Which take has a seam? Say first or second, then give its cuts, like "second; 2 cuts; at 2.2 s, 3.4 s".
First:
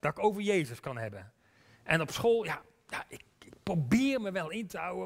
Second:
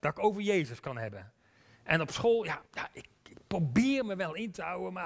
second; 1 cut; at 2.7 s